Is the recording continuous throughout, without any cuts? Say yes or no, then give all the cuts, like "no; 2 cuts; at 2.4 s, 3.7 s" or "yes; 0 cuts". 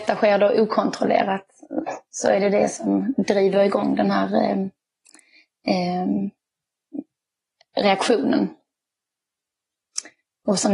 yes; 0 cuts